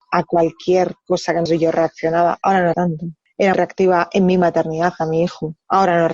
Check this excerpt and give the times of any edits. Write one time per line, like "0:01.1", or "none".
0:01.5
0:02.7
0:03.5